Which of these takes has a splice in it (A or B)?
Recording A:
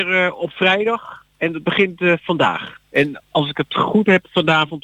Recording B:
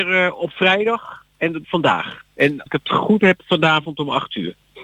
B